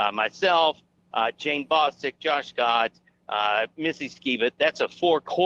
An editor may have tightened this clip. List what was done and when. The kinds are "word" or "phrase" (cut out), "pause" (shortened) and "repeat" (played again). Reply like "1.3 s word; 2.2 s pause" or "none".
none